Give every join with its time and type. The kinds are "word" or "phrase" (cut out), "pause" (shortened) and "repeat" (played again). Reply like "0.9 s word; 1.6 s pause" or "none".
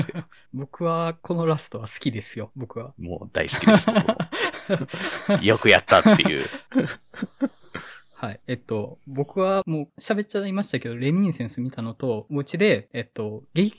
none

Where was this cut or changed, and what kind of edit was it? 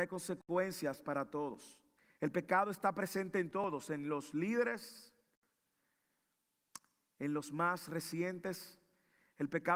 2.0 s pause

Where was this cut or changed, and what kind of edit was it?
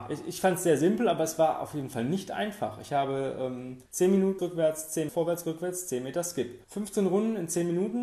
3.9 s pause; 4.4 s phrase; 5.1 s phrase; 6.6 s pause

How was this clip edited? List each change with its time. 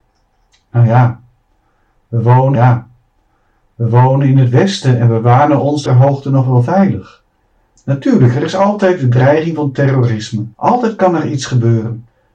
2.6 s repeat; 5.9 s phrase; 10.5 s pause

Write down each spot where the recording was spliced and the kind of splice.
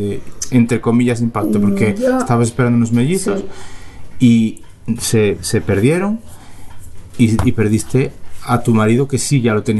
none

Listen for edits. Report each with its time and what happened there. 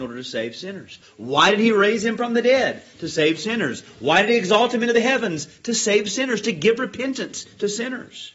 none

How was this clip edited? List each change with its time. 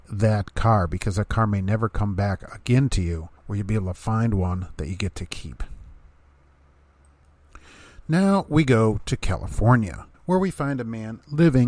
3.4 s pause; 10.1 s pause

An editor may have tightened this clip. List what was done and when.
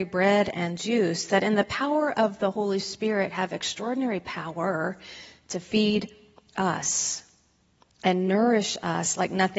none

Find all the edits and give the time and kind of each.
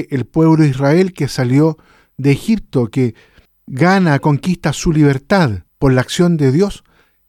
5.7 s pause

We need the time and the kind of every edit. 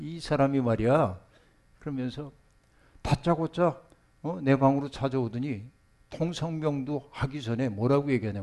none

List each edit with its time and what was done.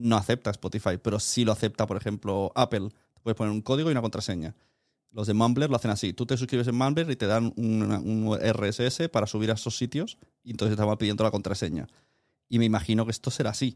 none

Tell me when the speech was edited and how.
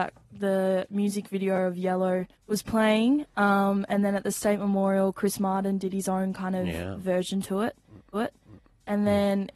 2.3 s pause; 8.1 s repeat

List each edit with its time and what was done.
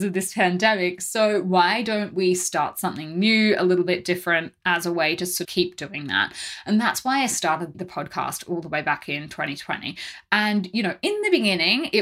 5.4 s word; 7.7 s word

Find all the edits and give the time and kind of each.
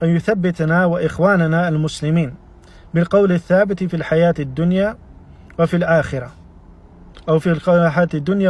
none

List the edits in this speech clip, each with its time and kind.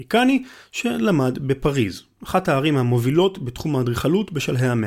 none

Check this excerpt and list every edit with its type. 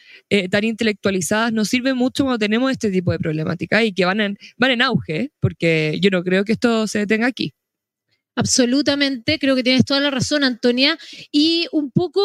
none

